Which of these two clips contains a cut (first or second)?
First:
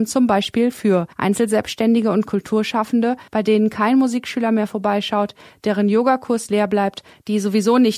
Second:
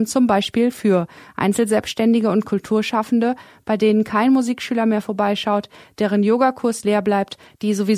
first